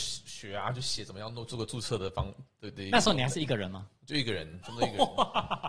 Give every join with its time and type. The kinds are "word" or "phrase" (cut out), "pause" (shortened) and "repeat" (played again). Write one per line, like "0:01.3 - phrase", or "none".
0:04.6 - word